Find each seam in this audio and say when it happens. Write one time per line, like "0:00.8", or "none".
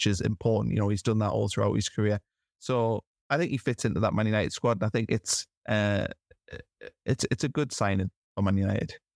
0:05.6

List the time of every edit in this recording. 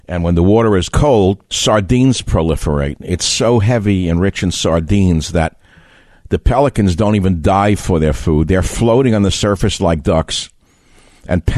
none

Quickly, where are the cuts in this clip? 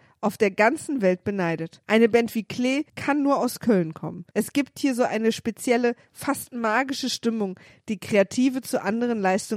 0:01.8
0:02.9
0:04.3

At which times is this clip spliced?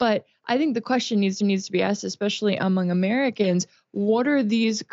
0:01.4

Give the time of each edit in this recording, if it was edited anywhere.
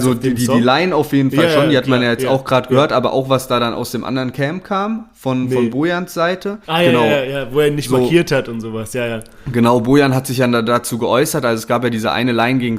0:06.6

